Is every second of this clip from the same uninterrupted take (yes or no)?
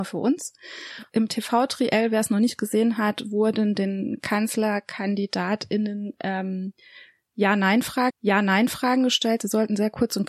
no